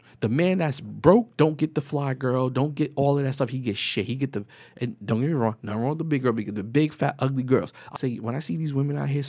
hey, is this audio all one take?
no; 1 cut; at 8.0 s

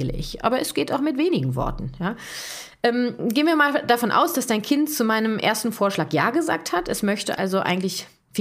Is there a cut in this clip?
no; 0 cuts

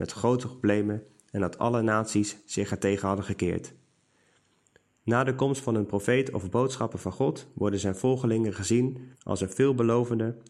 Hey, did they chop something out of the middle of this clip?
yes; 1 cut; at 9.1 s

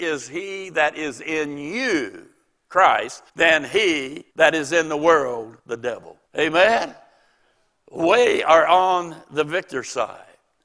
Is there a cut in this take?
yes; 4 cuts; at 3.3 s, 4.3 s, 5.6 s, 6.3 s

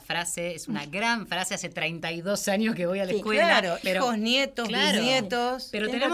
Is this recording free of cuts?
no; 1 cut; at 3.8 s

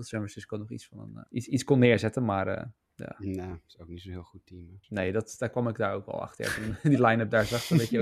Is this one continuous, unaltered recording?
no; 2 cuts; at 1.3 s, 4.8 s

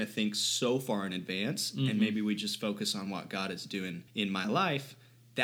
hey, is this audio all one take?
no; 1 cut; at 4.1 s

